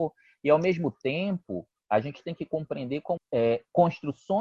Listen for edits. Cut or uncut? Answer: cut